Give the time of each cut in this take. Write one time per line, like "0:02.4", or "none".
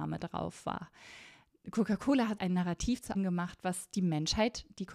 0:02.4
0:03.1